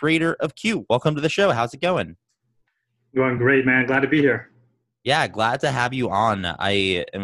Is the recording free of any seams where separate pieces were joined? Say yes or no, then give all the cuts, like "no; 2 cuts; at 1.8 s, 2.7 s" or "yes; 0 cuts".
yes; 0 cuts